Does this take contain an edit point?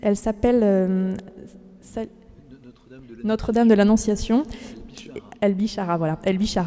no; 0 cuts

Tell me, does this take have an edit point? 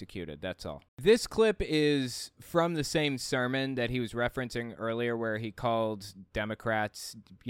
no; 0 cuts

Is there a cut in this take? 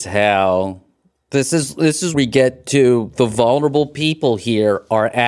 yes; 1 cut; at 2.1 s

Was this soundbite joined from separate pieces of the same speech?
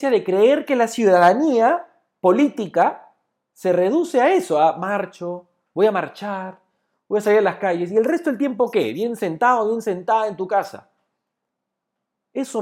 no; 0 cuts

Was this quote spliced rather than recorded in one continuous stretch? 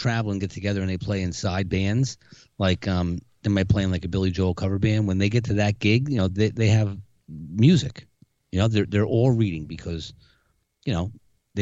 no; 0 cuts

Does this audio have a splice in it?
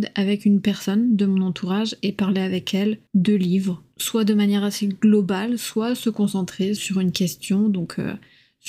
yes; 2 cuts; at 3.1 s, 6.8 s

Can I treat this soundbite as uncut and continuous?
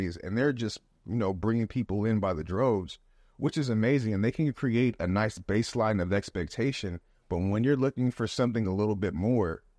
yes; 0 cuts

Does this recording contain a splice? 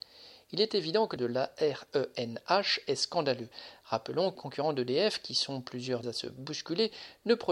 yes; 3 cuts; at 1.2 s, 4.4 s, 6.0 s

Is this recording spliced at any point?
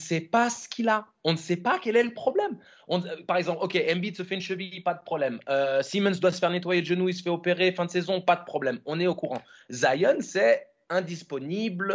no; 0 cuts

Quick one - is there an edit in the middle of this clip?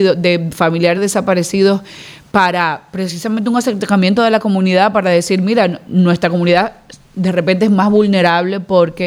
yes; 2 cuts; at 1.0 s, 5.9 s

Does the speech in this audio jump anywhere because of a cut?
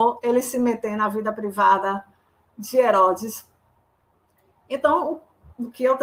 no; 0 cuts

